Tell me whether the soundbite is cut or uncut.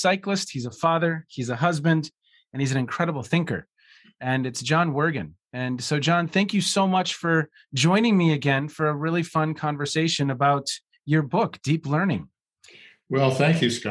uncut